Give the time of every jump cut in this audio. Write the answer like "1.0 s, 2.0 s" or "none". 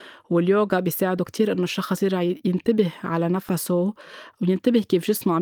none